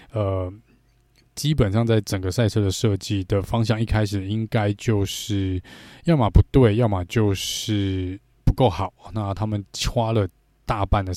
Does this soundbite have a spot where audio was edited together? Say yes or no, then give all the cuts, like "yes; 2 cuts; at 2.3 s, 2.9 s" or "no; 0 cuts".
no; 0 cuts